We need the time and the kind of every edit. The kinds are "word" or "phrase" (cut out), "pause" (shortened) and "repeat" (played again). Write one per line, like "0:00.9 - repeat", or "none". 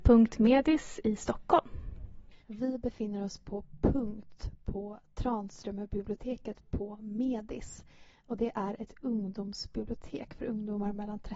0:02.4 - pause